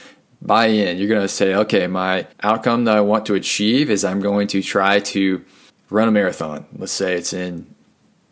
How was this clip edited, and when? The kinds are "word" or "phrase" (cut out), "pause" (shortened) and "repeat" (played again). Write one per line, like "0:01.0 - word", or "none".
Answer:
0:02.3 - pause
0:05.7 - pause

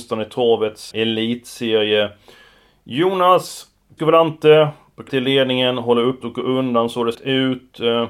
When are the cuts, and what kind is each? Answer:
0:00.9 - word
0:04.0 - word
0:05.1 - word
0:06.2 - word
0:07.1 - word

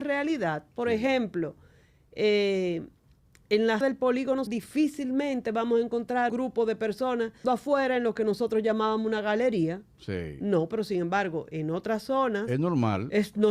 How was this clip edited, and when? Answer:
0:03.8 - word
0:04.5 - word
0:06.3 - word
0:07.4 - word

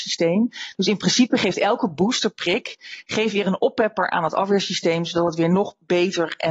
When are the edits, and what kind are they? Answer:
none

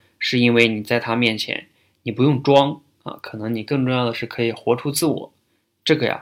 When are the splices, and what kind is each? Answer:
none

